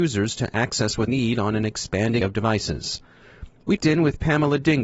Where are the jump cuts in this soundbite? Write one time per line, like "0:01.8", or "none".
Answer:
0:01.1
0:02.2
0:03.8